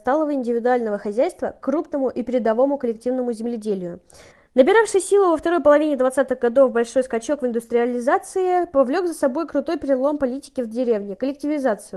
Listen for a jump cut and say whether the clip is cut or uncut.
cut